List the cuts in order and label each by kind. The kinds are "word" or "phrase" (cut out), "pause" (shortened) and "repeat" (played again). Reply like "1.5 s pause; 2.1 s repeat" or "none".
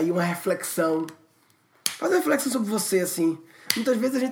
none